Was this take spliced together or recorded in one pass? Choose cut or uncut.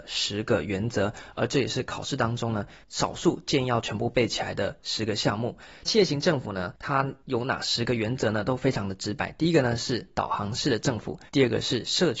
cut